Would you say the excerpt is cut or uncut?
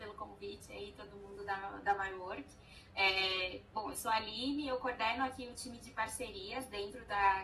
uncut